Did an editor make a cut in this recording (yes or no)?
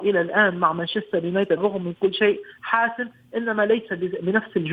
yes